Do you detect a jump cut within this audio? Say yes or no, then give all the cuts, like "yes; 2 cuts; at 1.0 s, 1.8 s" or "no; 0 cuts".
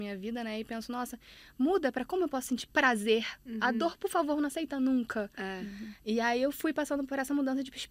no; 0 cuts